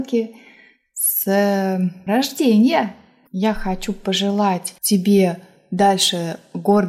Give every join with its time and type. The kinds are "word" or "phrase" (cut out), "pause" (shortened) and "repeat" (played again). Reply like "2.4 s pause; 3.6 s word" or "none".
2.1 s word; 4.8 s pause